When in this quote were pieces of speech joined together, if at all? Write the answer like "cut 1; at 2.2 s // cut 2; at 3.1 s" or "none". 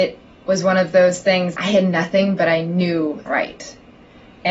cut 1; at 1.6 s // cut 2; at 3.3 s